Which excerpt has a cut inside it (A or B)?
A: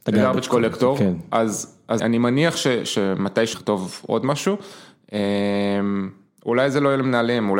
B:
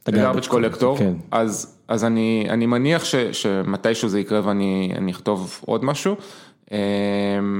A